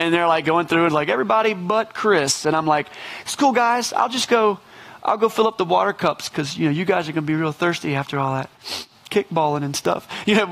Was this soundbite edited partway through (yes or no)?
no